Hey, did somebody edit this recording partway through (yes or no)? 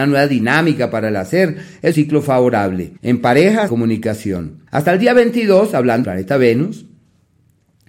yes